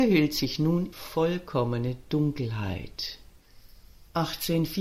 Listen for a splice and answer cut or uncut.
cut